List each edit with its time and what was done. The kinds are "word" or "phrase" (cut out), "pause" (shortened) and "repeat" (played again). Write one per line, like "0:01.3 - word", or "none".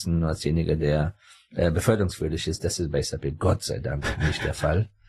none